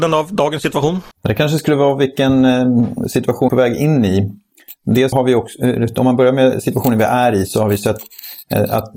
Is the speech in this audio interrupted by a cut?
yes; 3 cuts; at 1.1 s, 3.5 s, 5.1 s

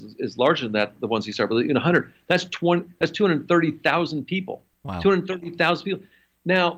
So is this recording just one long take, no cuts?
no; 1 cut; at 4.7 s

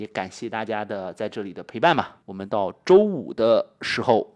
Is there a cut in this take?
yes; 1 cut; at 2.2 s

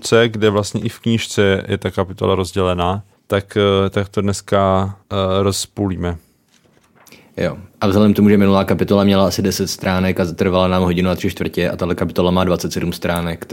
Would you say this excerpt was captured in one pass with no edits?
no; 3 cuts; at 3.1 s, 5.0 s, 7.7 s

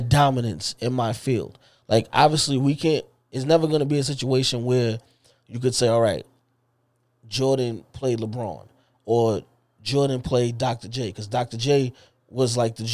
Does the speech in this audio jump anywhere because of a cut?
no; 0 cuts

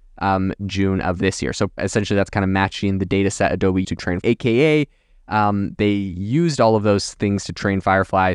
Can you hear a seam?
yes; 3 cuts; at 1.8 s, 3.8 s, 4.2 s

